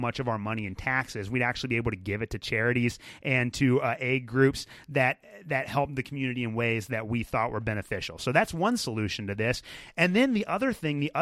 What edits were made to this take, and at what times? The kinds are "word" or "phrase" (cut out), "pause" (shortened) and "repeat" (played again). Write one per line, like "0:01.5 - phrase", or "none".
none